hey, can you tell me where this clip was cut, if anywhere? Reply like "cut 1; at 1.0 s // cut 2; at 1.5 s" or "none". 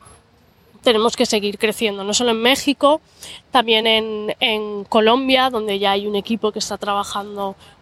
none